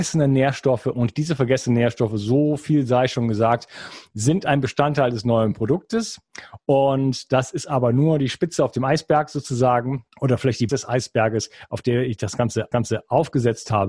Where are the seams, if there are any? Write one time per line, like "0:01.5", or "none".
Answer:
0:10.1
0:10.7
0:12.7